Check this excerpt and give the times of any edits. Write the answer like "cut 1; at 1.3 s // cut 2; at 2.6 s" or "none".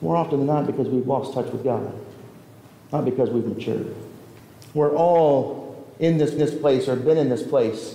cut 1; at 4.4 s // cut 2; at 6.4 s